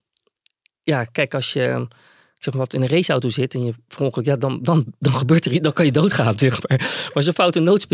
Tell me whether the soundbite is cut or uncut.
uncut